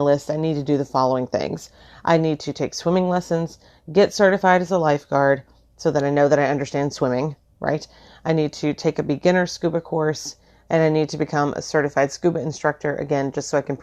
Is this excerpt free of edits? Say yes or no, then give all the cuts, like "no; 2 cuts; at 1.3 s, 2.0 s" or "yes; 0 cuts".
yes; 0 cuts